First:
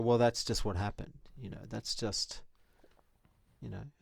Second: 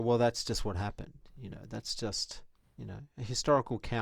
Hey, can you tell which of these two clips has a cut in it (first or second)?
second